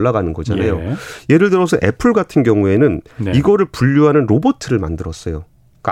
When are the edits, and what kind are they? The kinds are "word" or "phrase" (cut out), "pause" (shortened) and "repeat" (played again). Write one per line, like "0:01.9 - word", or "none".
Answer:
none